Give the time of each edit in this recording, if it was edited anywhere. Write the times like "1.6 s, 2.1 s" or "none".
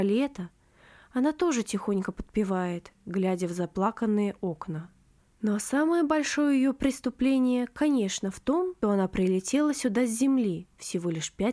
8.8 s